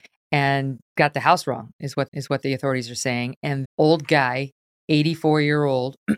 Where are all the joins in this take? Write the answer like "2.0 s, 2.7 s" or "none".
1.0 s, 2.1 s, 3.6 s